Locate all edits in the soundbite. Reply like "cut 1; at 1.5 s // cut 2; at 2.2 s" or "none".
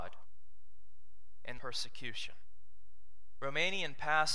cut 1; at 1.6 s